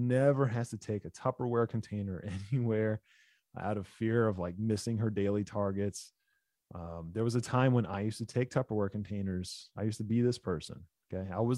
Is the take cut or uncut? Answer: uncut